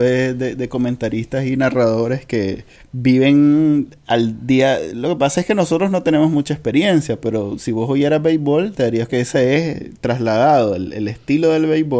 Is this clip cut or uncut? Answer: cut